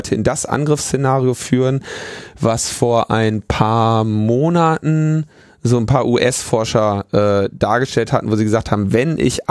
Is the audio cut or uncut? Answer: uncut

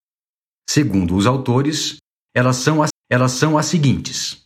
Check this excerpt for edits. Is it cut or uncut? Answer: cut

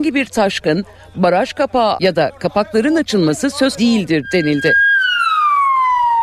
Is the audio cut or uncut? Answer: cut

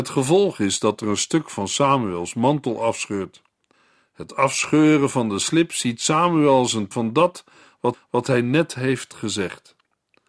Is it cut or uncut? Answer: cut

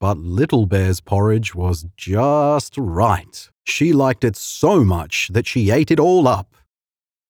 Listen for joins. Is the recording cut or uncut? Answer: cut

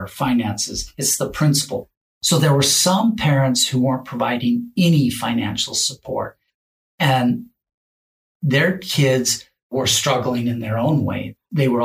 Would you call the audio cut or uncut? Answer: uncut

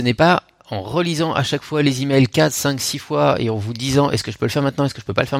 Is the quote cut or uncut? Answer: uncut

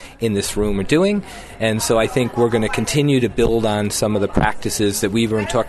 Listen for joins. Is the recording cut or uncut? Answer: uncut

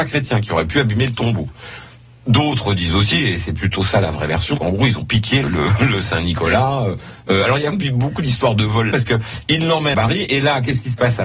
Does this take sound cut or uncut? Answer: cut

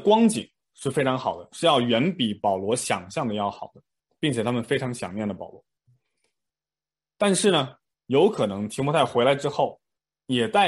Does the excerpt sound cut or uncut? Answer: uncut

